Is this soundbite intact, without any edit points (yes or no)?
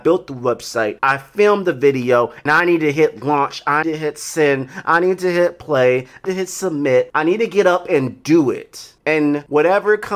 no